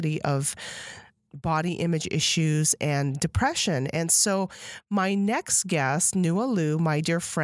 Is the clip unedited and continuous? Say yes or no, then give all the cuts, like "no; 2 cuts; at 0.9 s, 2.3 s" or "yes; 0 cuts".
yes; 0 cuts